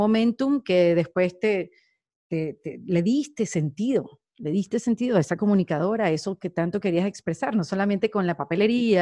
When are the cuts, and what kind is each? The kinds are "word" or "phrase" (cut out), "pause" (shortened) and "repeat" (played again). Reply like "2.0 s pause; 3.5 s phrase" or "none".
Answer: none